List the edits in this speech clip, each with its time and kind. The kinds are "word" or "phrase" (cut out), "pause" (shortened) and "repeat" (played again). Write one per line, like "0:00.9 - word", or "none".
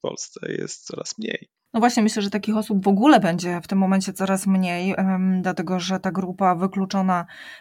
none